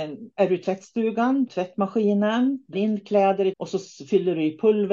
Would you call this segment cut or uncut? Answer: cut